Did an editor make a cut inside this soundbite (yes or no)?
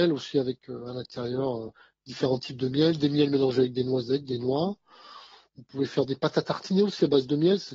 no